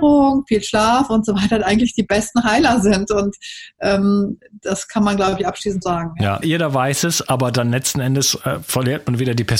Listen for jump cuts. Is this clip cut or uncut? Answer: cut